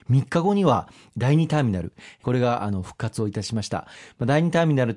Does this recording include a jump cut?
no; 0 cuts

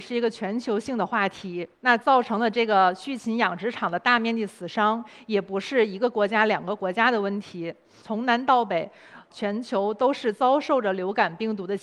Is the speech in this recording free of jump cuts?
no; 2 cuts; at 1.7 s, 9.3 s

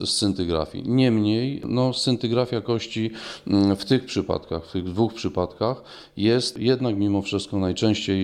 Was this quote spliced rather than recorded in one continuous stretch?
no; 0 cuts

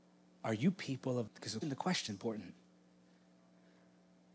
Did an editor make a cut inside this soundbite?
yes; 3 cuts; at 1.3 s, 1.6 s, 2.1 s

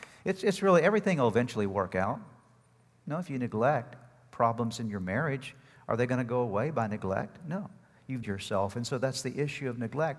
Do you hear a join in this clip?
yes; 1 cut; at 8.2 s

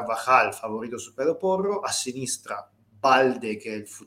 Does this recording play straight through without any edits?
yes; 0 cuts

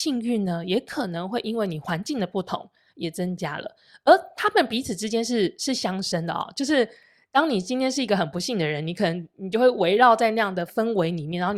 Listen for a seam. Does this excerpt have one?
no; 0 cuts

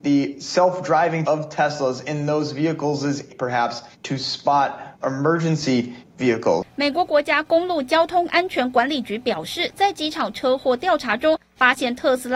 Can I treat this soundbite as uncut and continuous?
no; 4 cuts; at 1.2 s, 3.3 s, 3.9 s, 5.0 s

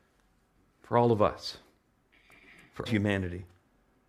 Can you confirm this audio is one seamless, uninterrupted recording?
no; 1 cut; at 2.9 s

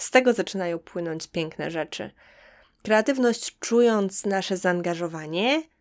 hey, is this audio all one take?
yes; 0 cuts

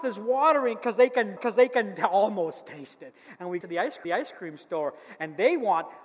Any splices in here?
yes; 3 cuts; at 1.4 s, 3.6 s, 4.0 s

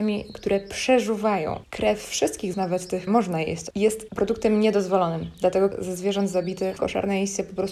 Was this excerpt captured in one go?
no; 5 cuts; at 2.5 s, 3.1 s, 3.7 s, 5.7 s, 6.8 s

